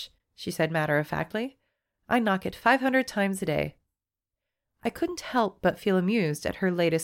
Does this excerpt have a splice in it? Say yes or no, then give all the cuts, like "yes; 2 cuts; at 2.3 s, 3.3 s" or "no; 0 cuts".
no; 0 cuts